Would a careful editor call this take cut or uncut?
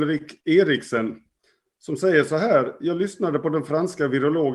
uncut